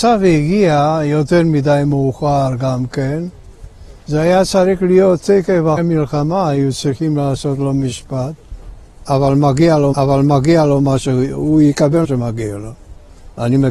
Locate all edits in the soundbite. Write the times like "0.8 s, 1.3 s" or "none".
5.8 s, 9.9 s, 12.0 s